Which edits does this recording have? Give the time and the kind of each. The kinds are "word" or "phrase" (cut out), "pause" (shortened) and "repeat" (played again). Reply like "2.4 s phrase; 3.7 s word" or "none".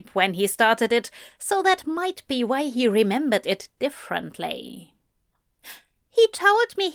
none